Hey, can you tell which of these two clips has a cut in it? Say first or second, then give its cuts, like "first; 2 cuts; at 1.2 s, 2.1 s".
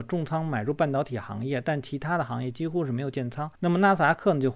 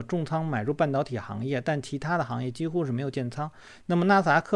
first; 1 cut; at 3.6 s